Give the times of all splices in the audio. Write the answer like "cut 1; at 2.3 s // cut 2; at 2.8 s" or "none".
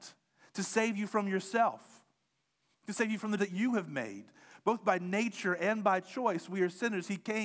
cut 1; at 3.4 s

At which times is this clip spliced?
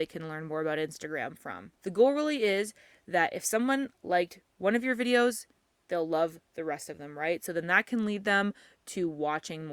none

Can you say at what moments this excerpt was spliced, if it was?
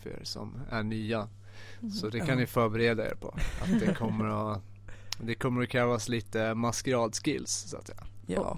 none

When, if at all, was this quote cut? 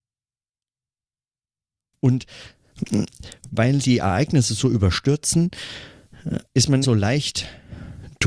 cut 1; at 3.8 s // cut 2; at 6.4 s // cut 3; at 6.8 s

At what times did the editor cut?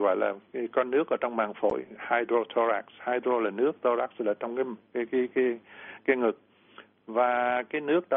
none

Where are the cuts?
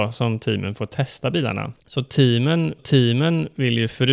cut 1; at 1.8 s // cut 2; at 2.8 s

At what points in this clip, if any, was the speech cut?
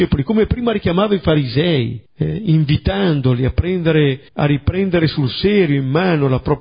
cut 1; at 2.1 s // cut 2; at 4.3 s

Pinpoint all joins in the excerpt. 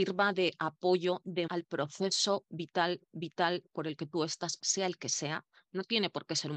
cut 1; at 1.5 s // cut 2; at 3.1 s // cut 3; at 4.6 s

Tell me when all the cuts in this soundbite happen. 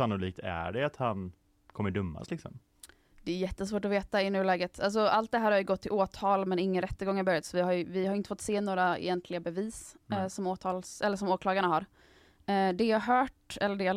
none

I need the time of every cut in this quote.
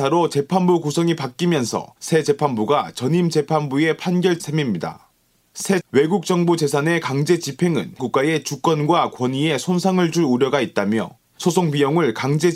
cut 1; at 4.4 s // cut 2; at 5.8 s // cut 3; at 8.0 s

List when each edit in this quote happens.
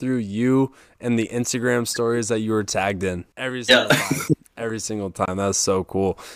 cut 1; at 3.3 s

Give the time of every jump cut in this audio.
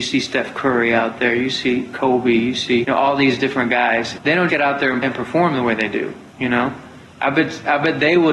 cut 1; at 2.8 s // cut 2; at 4.5 s // cut 3; at 5.0 s

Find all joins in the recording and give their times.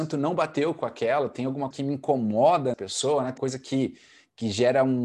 cut 1; at 1.7 s // cut 2; at 2.7 s // cut 3; at 3.4 s

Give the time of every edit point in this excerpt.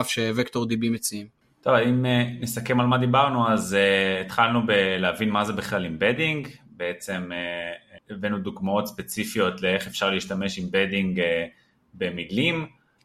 none

